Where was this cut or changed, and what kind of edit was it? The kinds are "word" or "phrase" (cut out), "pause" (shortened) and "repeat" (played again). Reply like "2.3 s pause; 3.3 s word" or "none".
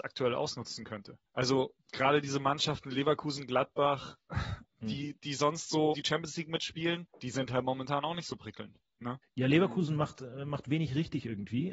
1.3 s pause; 4.7 s pause; 5.9 s word; 7.1 s pause; 9.2 s pause